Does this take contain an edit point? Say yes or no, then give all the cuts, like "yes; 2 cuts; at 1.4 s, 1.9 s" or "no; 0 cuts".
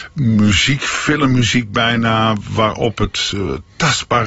no; 0 cuts